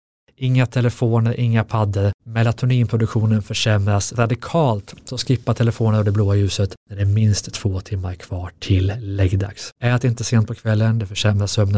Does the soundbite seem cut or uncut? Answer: cut